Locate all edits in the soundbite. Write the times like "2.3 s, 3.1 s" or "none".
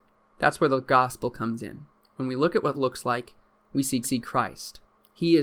2.0 s, 2.7 s, 4.0 s